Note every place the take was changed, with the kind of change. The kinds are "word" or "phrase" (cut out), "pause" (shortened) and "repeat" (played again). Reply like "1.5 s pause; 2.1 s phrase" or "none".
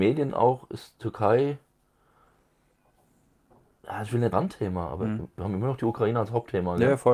4.3 s word